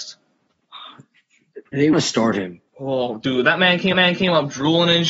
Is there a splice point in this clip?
yes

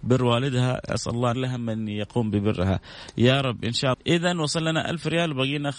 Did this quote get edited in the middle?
yes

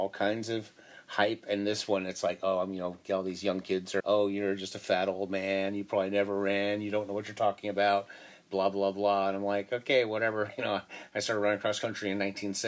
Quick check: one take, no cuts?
no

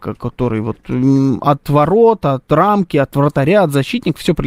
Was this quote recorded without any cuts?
yes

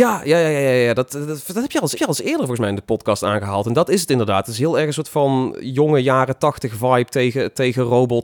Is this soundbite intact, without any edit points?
no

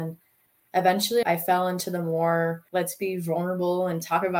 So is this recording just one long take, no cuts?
no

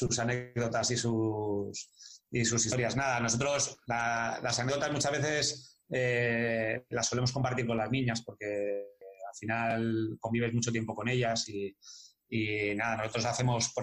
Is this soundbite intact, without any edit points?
no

